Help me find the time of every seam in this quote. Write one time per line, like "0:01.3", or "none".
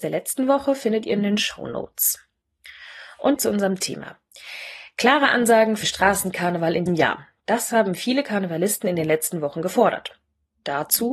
0:03.4
0:03.8
0:05.8
0:06.9